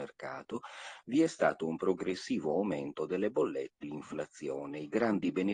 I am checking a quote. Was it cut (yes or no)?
yes